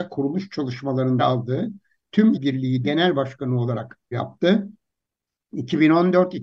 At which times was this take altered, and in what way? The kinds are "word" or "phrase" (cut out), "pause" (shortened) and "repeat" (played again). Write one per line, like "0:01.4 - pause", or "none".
0:01.2 - word
0:02.3 - word
0:02.8 - word
0:04.1 - word

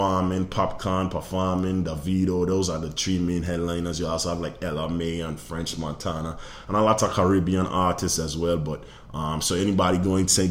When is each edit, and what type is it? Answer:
none

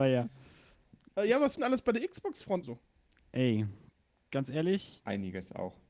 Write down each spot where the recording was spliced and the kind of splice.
0:01.5 - word
0:02.6 - word

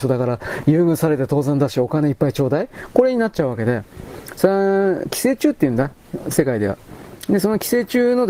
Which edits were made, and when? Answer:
0:06.2 - phrase

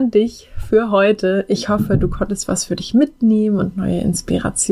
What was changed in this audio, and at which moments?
none

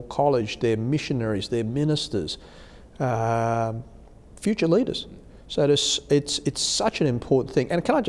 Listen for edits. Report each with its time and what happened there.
none

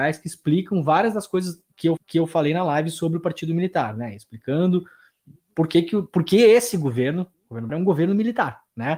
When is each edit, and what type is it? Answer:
0:02.0 - repeat
0:07.3 - pause
0:07.7 - word

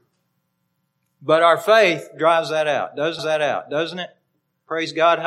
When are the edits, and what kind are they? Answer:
0:03.2 - repeat

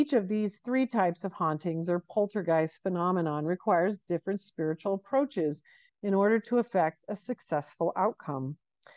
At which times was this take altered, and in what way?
none

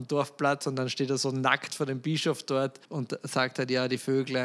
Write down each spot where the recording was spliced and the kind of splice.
0:02.8 - pause

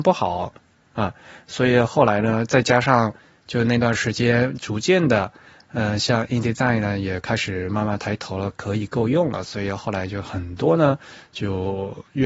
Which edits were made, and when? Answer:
none

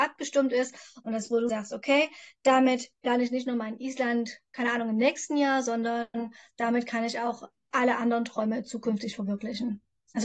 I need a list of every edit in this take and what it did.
0:01.5 - word

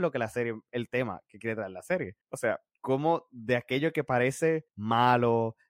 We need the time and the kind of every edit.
0:02.2 - pause
0:02.7 - pause
0:04.7 - pause

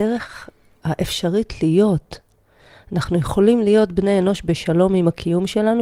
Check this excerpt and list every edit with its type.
none

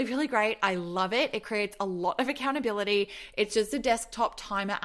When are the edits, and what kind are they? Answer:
none

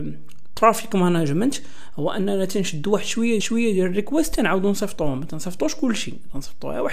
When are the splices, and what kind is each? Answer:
0:03.4 - repeat

